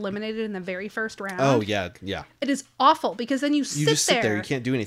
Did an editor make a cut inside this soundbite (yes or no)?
no